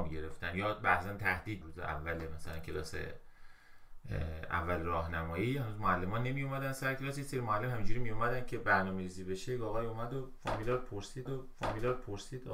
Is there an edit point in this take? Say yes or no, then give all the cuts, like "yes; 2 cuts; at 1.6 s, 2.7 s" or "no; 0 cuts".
yes; 2 cuts; at 1.6 s, 11.3 s